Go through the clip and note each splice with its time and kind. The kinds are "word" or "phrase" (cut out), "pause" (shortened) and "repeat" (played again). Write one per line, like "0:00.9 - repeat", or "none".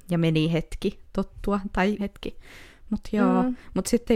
0:02.0 - word

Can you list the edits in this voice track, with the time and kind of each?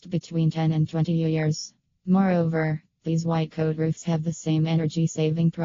none

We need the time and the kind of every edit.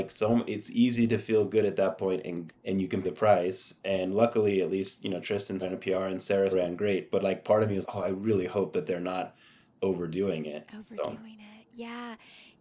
0:02.5 - word
0:03.0 - word
0:05.6 - word
0:06.5 - word
0:07.8 - word

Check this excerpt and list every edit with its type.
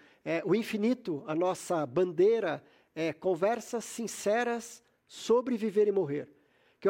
none

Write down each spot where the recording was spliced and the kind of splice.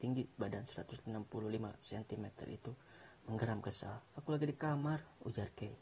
0:04.1 - pause

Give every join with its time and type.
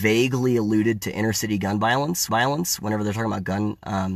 0:02.3 - repeat

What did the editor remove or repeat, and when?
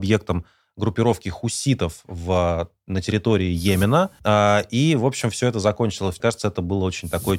0:04.2 - pause
0:06.2 - phrase

